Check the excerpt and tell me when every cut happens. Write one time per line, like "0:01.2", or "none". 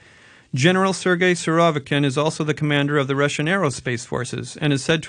none